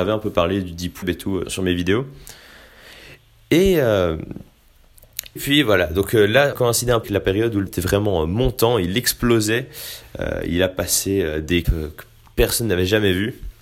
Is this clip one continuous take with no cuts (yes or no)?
no